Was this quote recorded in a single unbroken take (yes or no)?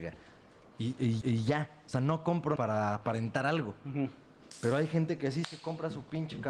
no